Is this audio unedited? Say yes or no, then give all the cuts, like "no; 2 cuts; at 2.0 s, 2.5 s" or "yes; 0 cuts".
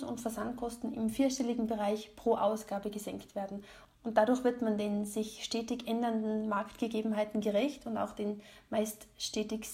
yes; 0 cuts